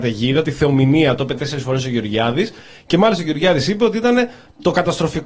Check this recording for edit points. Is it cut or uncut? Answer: uncut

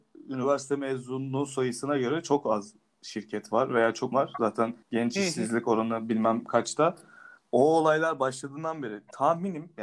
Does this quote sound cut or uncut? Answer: cut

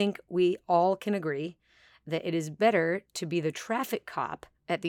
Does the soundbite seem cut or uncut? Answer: uncut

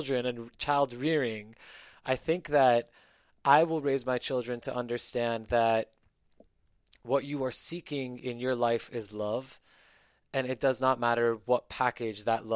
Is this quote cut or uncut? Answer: uncut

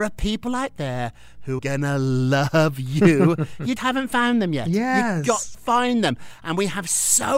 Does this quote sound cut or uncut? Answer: cut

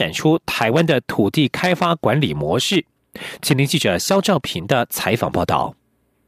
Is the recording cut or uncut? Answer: uncut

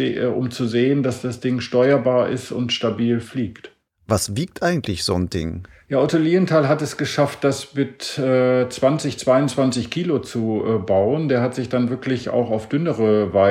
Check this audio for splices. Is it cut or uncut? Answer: uncut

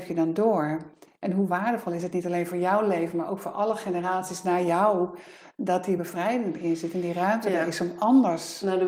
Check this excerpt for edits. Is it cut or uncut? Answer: uncut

